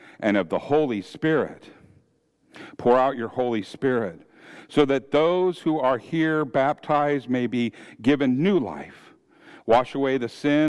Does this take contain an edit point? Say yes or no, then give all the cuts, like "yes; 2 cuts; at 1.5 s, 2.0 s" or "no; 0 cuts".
no; 0 cuts